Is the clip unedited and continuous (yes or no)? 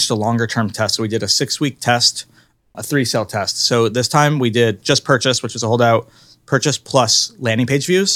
yes